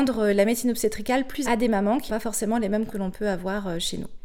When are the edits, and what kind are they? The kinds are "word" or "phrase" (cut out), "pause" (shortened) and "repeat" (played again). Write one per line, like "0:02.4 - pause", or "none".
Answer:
0:01.4 - word
0:02.1 - word
0:02.9 - word